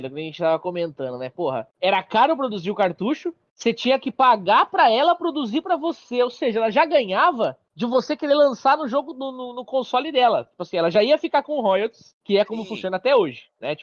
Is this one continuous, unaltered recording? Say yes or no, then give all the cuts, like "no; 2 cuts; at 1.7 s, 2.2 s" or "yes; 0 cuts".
yes; 0 cuts